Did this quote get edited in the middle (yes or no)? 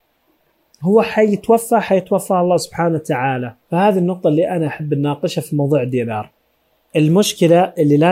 yes